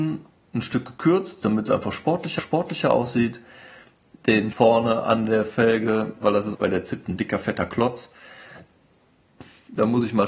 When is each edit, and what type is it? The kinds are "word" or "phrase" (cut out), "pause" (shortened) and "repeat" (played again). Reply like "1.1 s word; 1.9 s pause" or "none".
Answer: 2.4 s repeat; 4.5 s word; 6.2 s phrase; 6.5 s word

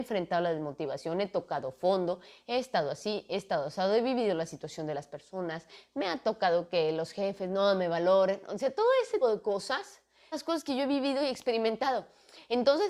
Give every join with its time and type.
9.2 s word; 10.3 s word

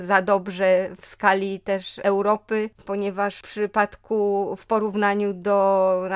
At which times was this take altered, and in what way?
none

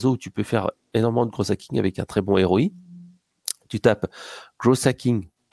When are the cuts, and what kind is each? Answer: none

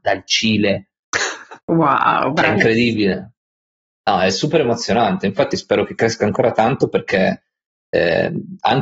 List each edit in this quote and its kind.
none

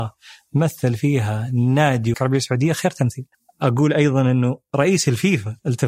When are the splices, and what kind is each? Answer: 2.1 s word; 3.3 s pause

